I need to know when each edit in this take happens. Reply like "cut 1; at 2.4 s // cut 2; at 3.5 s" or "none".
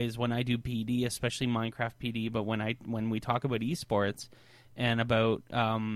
none